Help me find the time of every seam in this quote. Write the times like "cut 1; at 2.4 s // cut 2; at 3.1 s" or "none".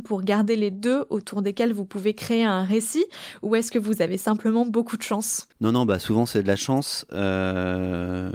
cut 1; at 5.5 s